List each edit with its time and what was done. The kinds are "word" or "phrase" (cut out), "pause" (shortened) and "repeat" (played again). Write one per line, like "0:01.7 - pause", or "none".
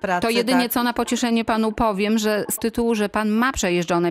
0:02.6 - word